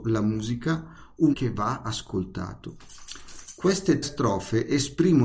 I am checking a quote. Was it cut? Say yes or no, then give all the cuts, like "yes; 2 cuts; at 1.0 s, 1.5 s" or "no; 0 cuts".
yes; 2 cuts; at 1.3 s, 4.0 s